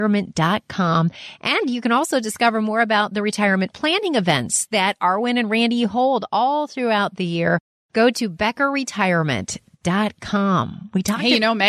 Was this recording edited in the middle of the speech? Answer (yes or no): no